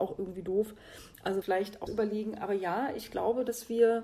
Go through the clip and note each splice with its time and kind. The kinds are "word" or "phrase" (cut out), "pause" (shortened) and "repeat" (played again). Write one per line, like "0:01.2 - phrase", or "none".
0:01.4 - phrase
0:01.9 - phrase